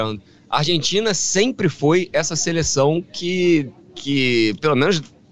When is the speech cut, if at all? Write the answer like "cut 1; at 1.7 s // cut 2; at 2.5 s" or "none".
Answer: cut 1; at 3.8 s